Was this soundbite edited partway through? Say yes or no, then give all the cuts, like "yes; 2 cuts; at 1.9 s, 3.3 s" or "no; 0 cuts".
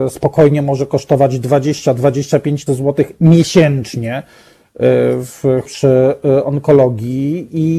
yes; 2 cuts; at 2.7 s, 5.6 s